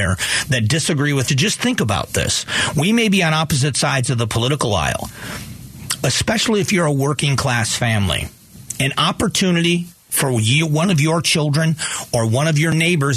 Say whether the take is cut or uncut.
cut